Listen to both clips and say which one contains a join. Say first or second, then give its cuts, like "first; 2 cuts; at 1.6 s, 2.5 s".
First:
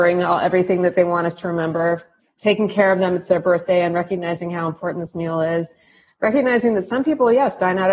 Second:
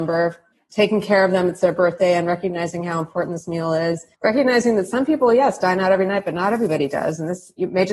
second; 1 cut; at 4.1 s